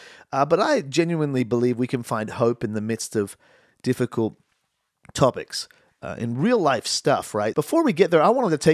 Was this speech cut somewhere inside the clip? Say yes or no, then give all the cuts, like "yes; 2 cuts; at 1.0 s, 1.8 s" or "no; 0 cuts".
yes; 1 cut; at 7.5 s